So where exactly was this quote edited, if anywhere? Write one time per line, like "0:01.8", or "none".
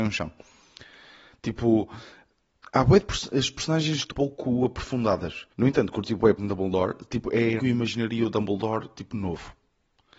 0:04.1
0:05.5
0:06.4
0:07.6